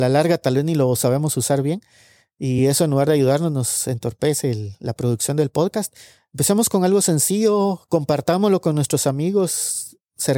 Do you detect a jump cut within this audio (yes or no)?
no